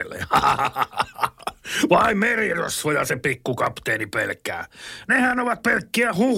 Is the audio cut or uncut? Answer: uncut